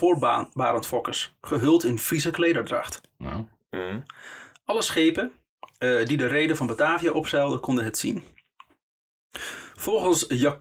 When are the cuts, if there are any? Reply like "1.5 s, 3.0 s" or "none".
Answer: none